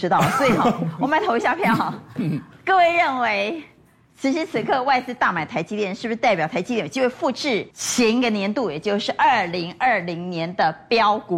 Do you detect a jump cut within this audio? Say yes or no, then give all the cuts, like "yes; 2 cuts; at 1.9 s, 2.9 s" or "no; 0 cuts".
yes; 1 cut; at 7.7 s